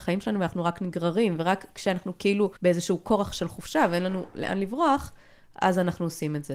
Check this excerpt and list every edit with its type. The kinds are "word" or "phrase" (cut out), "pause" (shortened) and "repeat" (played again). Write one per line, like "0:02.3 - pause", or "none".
0:02.6 - pause